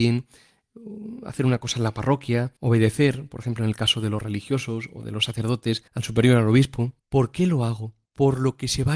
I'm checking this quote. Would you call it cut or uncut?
cut